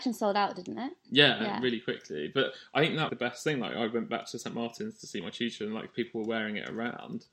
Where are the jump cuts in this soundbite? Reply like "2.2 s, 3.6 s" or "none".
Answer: 3.1 s